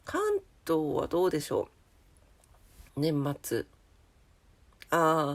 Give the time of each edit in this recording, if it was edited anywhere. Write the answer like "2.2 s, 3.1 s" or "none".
2.9 s